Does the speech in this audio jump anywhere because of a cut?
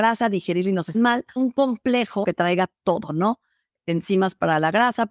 yes; 3 cuts; at 0.9 s, 1.4 s, 2.2 s

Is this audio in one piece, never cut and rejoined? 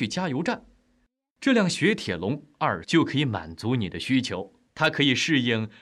no; 1 cut; at 2.8 s

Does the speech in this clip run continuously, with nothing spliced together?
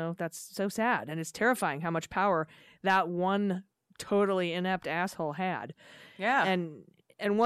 yes; 0 cuts

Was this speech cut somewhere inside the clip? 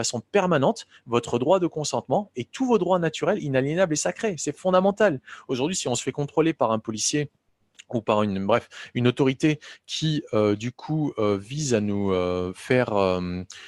no; 0 cuts

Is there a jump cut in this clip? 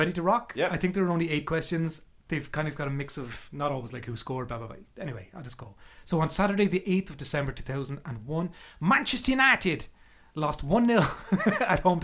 no; 0 cuts

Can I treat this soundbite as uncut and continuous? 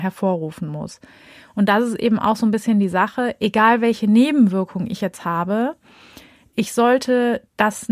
yes; 0 cuts

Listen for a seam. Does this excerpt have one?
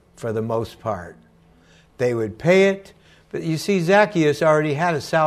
no; 0 cuts

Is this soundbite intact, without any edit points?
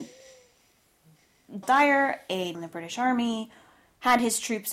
no; 2 cuts; at 1.6 s, 2.5 s

